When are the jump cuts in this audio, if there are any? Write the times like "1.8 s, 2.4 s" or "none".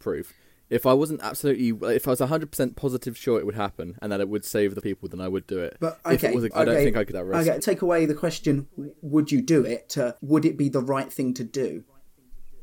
4.8 s, 6.5 s, 7.1 s, 7.6 s, 10.2 s